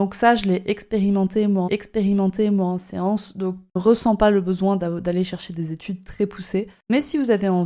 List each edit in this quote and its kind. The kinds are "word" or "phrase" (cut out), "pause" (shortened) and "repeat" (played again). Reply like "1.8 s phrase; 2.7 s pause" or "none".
1.7 s repeat; 3.8 s phrase